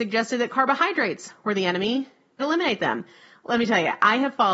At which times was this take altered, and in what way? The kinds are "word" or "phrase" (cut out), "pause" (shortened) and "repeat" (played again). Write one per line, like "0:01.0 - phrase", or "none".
0:02.4 - word